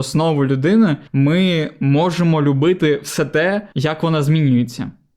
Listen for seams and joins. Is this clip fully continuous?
no; 2 cuts; at 1.1 s, 3.7 s

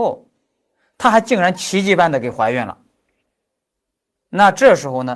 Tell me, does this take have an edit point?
no; 0 cuts

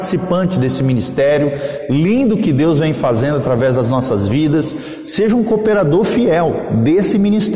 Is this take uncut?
yes; 0 cuts

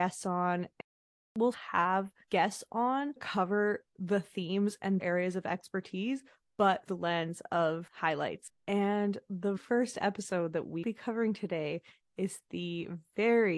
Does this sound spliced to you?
yes; 7 cuts; at 1.5 s, 3.2 s, 5.0 s, 6.9 s, 7.9 s, 9.6 s, 10.8 s

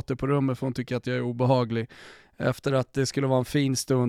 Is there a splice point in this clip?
no; 0 cuts

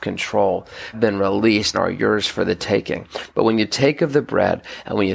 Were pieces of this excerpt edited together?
yes; 2 cuts; at 0.9 s, 1.7 s

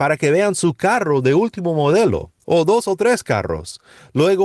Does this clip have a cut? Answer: no; 0 cuts

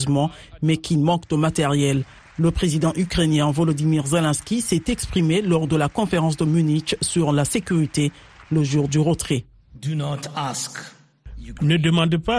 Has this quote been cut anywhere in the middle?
no; 0 cuts

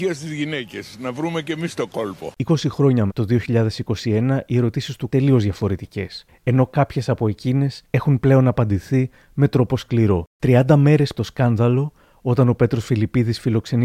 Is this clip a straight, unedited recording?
no; 5 cuts; at 2.4 s, 3.1 s, 5.1 s, 10.3 s, 11.2 s

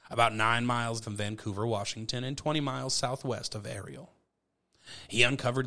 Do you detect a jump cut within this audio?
yes; 1 cut; at 1.0 s

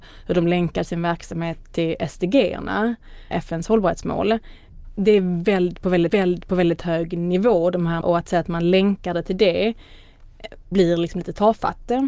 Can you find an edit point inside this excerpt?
yes; 3 cuts; at 6.1 s, 8.0 s, 10.7 s

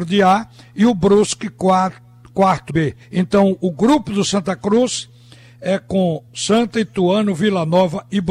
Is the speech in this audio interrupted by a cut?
yes; 3 cuts; at 2.7 s, 3.0 s, 6.3 s

